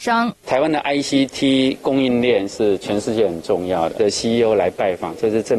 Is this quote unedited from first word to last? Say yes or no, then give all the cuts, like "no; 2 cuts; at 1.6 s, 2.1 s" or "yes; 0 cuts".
no; 1 cut; at 4.0 s